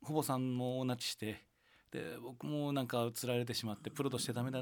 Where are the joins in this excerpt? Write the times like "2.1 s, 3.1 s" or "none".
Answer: none